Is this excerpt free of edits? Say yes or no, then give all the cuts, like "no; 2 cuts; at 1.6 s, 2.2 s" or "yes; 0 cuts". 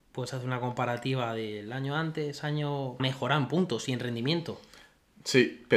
no; 1 cut; at 3.0 s